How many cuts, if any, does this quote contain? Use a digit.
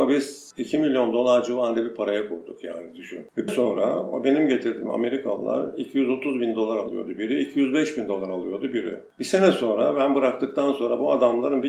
1